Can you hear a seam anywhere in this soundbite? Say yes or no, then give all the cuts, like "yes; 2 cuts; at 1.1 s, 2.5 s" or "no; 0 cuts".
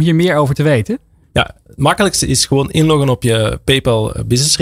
no; 0 cuts